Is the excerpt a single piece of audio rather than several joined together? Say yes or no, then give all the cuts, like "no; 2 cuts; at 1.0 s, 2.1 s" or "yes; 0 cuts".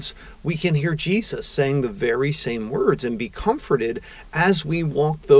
yes; 0 cuts